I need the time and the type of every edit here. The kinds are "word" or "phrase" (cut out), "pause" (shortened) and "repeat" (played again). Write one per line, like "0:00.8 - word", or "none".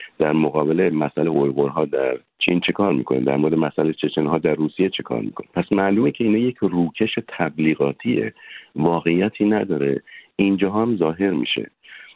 0:02.3 - pause